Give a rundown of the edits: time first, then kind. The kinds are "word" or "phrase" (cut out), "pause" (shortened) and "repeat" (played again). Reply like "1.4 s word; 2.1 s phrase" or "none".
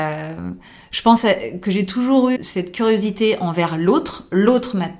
2.4 s word